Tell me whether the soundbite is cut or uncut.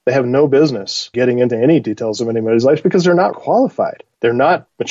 cut